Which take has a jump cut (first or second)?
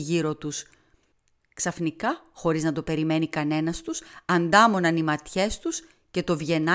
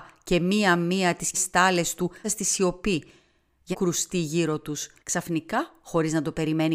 second